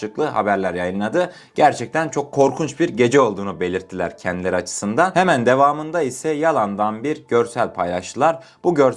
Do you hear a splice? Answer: no; 0 cuts

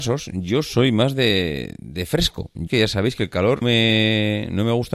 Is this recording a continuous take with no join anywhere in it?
no; 2 cuts; at 2.7 s, 3.6 s

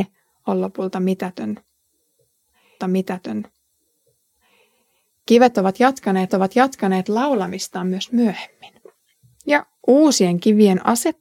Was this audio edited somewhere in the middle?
yes; 2 cuts; at 2.8 s, 6.3 s

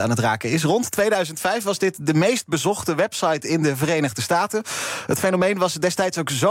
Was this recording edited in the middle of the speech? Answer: no; 0 cuts

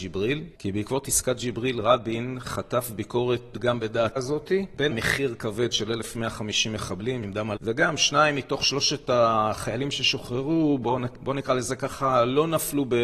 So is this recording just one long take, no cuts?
no; 5 cuts; at 3.5 s, 4.2 s, 4.9 s, 7.2 s, 7.6 s

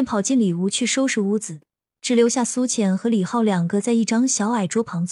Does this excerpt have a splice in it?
no; 0 cuts

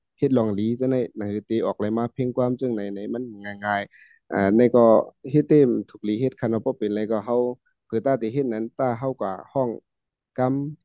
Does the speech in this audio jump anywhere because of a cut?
no; 0 cuts

